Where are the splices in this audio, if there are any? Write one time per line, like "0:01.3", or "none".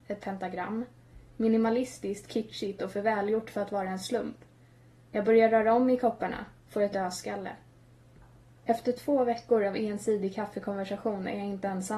0:06.9